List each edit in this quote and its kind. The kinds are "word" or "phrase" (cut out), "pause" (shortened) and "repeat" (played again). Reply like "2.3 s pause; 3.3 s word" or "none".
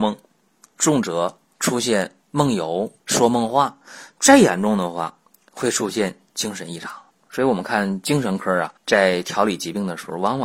1.4 s pause; 2.2 s pause; 3.0 s pause; 5.3 s pause; 7.1 s pause; 8.8 s pause